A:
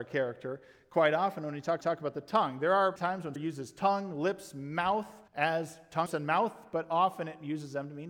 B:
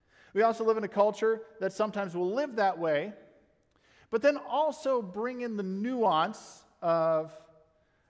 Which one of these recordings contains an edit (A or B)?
A